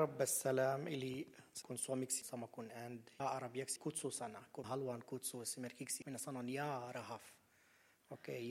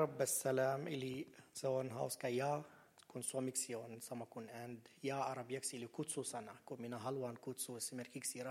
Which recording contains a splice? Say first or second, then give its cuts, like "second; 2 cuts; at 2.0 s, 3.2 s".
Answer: first; 6 cuts; at 1.6 s, 2.2 s, 3.2 s, 3.8 s, 4.6 s, 6.0 s